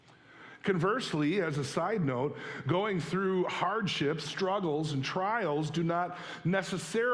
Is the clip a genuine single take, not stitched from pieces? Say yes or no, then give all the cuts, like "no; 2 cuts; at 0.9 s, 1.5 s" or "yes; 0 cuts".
no; 1 cut; at 4.2 s